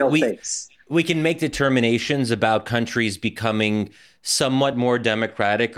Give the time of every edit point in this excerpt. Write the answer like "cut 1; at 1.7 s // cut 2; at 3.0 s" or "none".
none